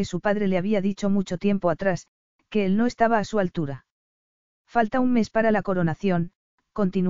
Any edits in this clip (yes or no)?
no